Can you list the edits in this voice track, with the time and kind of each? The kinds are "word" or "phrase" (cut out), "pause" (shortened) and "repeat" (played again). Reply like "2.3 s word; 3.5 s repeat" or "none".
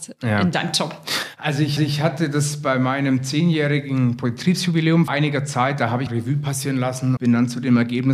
1.8 s repeat; 5.1 s word; 6.1 s word; 7.2 s word